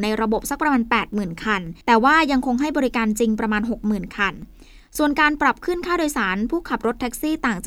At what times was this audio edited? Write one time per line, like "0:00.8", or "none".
0:01.8

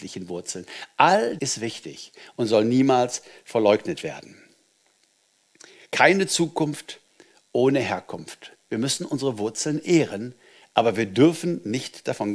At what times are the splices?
0:01.4

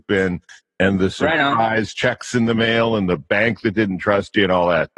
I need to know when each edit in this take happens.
none

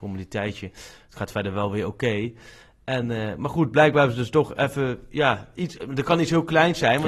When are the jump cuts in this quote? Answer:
none

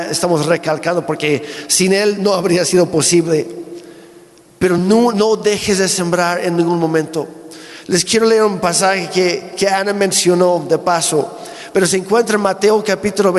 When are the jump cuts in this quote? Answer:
none

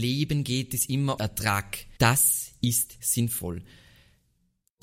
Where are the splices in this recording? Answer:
0:01.2
0:02.0
0:03.0

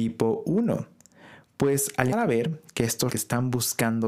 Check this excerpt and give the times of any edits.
0:02.1
0:03.1

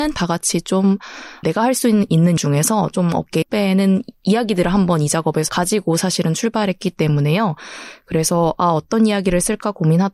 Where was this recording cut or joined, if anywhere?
0:01.4
0:02.4
0:03.4
0:05.5

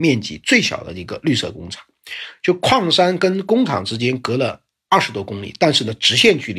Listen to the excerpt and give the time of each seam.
none

